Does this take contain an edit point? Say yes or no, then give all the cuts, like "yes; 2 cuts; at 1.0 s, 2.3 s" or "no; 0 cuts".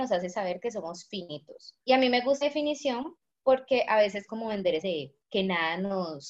yes; 5 cuts; at 1.8 s, 2.4 s, 4.3 s, 4.8 s, 5.2 s